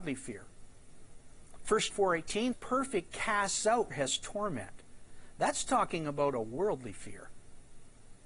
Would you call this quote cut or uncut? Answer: cut